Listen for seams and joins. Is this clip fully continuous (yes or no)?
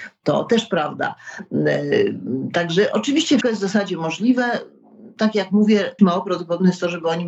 no